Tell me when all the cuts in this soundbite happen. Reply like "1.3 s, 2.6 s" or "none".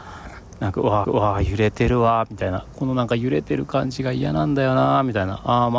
1.0 s

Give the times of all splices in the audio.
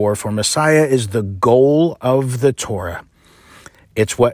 none

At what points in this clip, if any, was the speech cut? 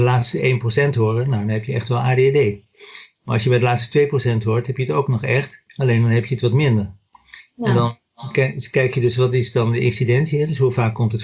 5.7 s

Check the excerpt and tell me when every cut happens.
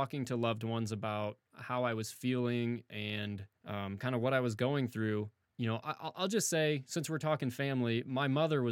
5.5 s

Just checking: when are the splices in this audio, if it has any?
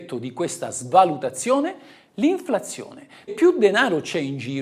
3.3 s

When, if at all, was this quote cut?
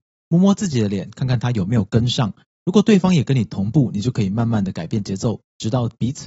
none

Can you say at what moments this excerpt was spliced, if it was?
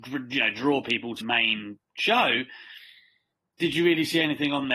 1.2 s

